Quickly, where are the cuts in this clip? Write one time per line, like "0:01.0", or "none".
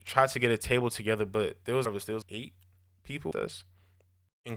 0:01.8
0:02.2
0:03.3